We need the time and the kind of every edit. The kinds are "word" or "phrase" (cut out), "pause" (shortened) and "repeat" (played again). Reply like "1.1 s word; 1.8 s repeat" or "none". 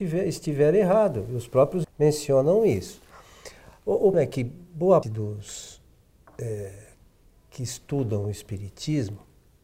1.8 s phrase; 4.1 s word; 5.0 s word